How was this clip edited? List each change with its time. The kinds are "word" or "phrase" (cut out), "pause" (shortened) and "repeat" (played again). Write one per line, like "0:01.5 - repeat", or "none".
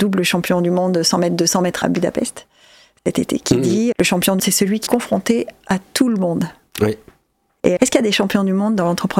0:01.8 - word
0:03.9 - word
0:04.4 - word
0:04.9 - word
0:07.8 - word